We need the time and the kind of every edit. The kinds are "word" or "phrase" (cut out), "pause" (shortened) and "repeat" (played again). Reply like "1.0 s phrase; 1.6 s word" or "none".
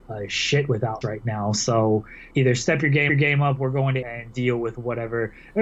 1.0 s word; 2.3 s pause; 3.1 s repeat; 4.0 s word; 4.3 s word